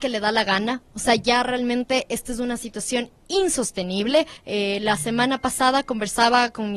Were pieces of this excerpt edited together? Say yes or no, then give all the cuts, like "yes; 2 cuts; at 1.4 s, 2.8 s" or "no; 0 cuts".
yes; 1 cut; at 4.4 s